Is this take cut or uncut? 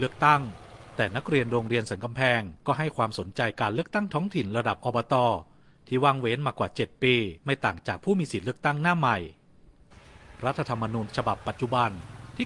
cut